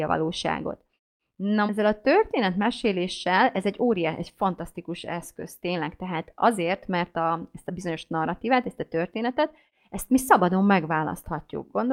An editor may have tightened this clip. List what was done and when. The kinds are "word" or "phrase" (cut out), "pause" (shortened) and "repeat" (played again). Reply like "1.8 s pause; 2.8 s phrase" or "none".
1.7 s word